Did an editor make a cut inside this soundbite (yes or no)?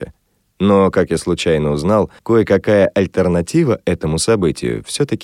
yes